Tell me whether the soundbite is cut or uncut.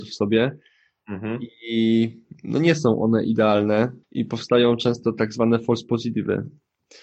cut